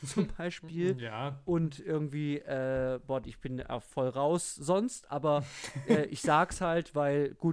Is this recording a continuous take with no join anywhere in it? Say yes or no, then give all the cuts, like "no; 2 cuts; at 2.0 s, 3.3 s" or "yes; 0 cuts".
yes; 0 cuts